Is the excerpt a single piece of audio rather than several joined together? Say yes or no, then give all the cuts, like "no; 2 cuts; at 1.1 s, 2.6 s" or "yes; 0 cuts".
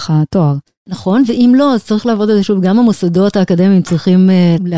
yes; 0 cuts